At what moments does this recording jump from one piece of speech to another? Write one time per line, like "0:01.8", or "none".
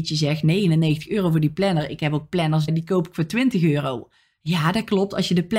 0:02.7